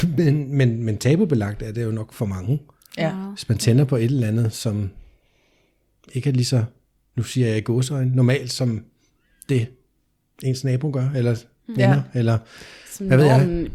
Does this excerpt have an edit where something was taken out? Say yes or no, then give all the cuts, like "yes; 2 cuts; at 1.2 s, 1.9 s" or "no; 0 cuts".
no; 0 cuts